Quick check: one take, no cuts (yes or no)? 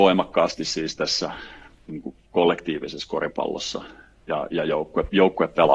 yes